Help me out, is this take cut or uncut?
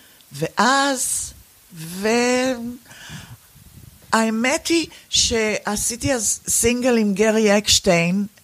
cut